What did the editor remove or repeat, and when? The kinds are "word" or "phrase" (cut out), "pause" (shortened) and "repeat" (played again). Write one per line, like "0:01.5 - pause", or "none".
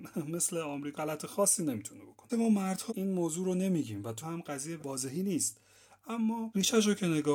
0:00.9 - word
0:02.3 - word
0:02.9 - word
0:04.2 - word
0:04.8 - word